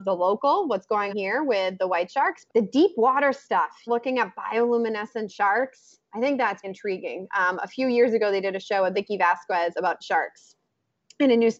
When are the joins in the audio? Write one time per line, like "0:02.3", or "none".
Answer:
0:01.1
0:02.5
0:03.9
0:06.6
0:08.9
0:10.0